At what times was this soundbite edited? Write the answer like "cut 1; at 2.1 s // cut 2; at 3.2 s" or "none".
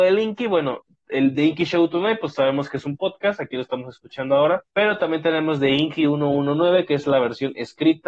cut 1; at 4.7 s